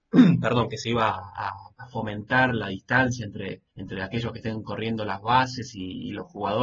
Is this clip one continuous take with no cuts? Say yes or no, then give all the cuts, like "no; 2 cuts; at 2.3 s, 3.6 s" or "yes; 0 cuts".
no; 2 cuts; at 1.7 s, 3.7 s